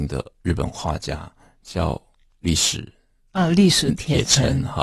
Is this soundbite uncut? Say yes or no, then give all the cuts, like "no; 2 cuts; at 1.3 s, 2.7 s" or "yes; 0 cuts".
yes; 0 cuts